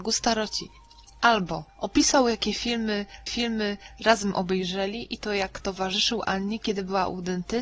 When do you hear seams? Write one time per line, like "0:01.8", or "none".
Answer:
0:01.7
0:03.3